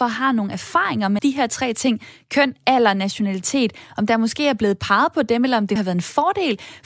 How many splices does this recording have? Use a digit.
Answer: 2